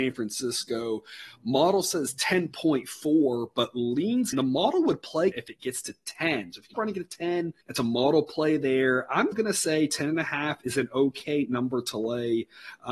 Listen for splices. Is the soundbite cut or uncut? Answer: cut